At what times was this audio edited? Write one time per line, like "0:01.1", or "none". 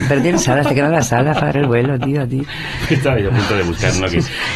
0:01.5